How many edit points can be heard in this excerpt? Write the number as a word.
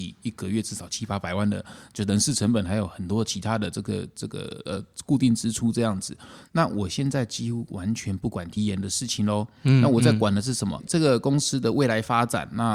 one